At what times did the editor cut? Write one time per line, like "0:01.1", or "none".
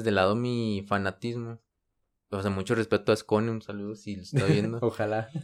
0:02.1

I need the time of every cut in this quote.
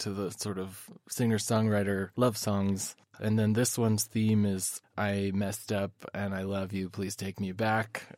0:02.1

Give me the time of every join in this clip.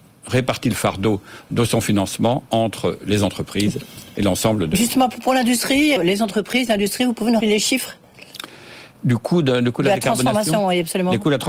0:06.0
0:07.4

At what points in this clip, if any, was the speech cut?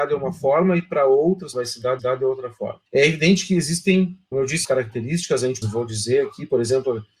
0:01.5
0:02.0
0:02.9
0:04.3
0:04.6
0:05.6

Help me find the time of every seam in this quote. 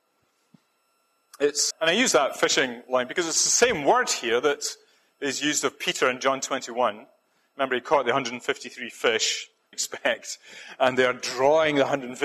0:01.7
0:09.7

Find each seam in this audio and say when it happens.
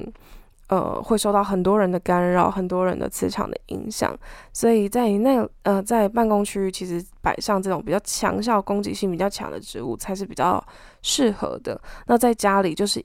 none

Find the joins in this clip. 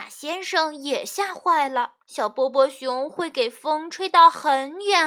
0:02.0

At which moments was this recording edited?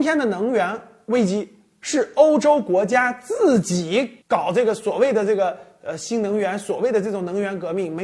0:04.2

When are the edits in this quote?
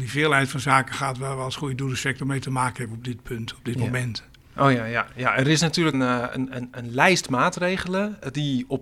0:05.9

